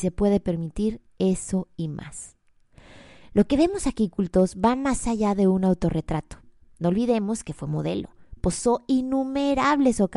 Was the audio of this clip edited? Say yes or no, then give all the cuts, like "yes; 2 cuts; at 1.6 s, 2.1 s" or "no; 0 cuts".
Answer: no; 0 cuts